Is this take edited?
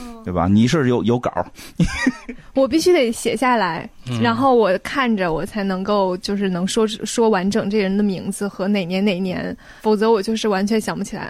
yes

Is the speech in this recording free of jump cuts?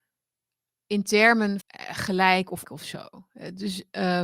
no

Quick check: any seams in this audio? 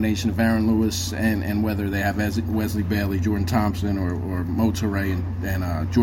no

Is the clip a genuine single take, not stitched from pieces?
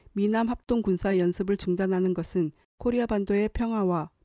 yes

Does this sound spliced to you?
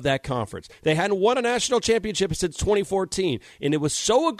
no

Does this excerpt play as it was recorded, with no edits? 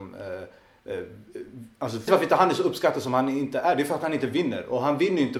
no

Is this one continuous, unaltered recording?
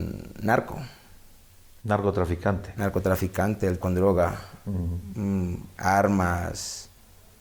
no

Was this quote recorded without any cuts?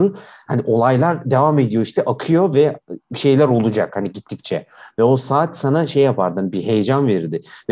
yes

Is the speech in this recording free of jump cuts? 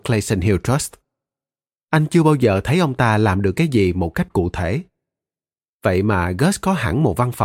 yes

